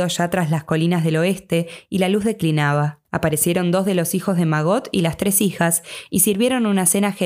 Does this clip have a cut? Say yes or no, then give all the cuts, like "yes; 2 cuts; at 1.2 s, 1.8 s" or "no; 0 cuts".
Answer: yes; 1 cut; at 3.0 s